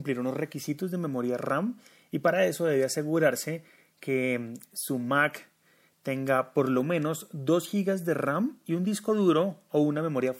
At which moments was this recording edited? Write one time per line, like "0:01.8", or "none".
none